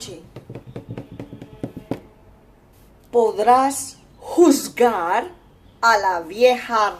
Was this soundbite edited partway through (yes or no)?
no